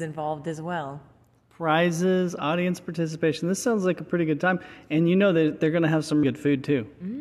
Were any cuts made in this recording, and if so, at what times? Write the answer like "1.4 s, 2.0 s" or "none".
6.2 s